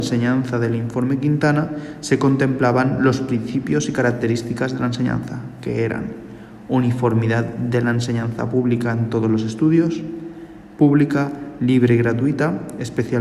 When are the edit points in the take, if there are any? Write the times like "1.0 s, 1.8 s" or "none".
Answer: none